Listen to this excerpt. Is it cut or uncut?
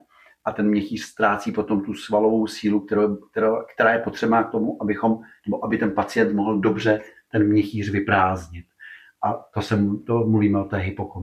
uncut